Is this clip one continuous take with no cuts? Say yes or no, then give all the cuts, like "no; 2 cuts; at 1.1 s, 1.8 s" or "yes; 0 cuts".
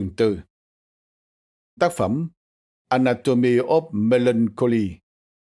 no; 1 cut; at 1.8 s